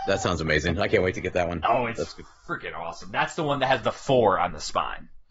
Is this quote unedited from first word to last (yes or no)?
yes